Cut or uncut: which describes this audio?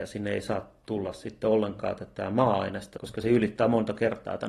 cut